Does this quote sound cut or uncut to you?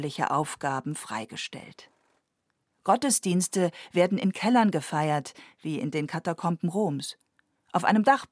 uncut